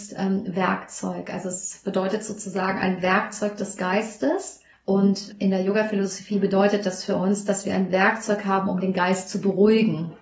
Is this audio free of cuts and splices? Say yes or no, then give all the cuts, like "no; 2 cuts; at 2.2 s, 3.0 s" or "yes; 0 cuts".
no; 1 cut; at 4.7 s